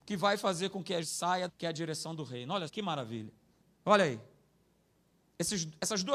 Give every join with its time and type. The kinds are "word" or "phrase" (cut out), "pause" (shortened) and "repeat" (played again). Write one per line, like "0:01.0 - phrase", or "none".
0:01.0 - word
0:01.5 - phrase
0:02.7 - word
0:03.6 - pause

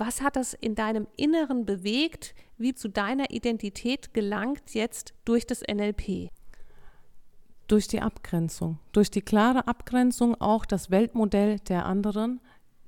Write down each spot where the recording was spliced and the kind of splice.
0:02.7 - phrase

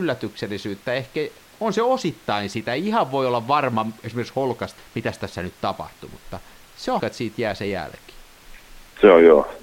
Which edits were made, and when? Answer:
0:04.8 - word
0:07.0 - word

